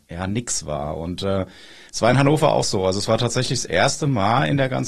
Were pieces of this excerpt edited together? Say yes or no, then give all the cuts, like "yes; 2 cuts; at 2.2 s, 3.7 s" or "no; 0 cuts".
no; 0 cuts